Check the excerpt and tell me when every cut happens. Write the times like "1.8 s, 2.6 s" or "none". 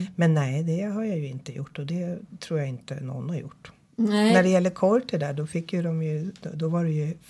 none